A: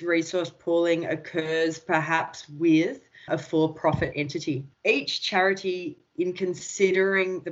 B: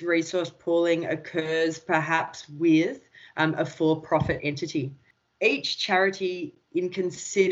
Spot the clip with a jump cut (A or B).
A